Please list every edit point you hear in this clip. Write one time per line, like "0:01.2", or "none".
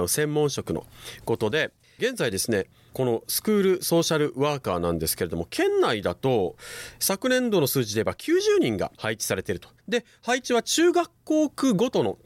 0:08.9
0:09.8